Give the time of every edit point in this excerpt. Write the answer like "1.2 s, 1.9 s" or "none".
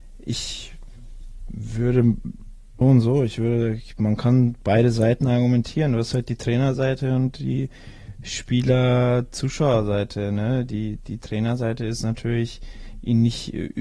2.8 s